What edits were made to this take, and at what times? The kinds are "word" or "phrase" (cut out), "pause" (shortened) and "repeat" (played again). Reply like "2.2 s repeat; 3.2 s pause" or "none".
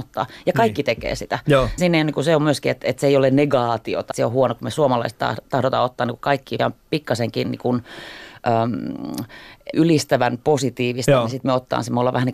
1.8 s word; 4.1 s word; 6.6 s word; 9.7 s word